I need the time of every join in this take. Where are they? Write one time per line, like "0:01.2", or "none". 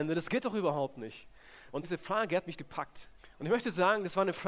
0:01.8
0:02.6
0:03.2